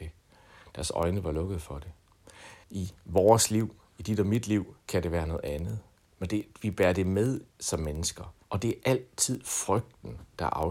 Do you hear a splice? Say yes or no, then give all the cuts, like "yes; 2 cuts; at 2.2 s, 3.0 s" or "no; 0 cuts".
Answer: yes; 5 cuts; at 2.6 s, 4.8 s, 6.0 s, 7.5 s, 8.4 s